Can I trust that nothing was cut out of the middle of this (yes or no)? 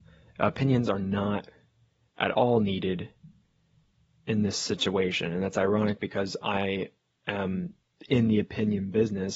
yes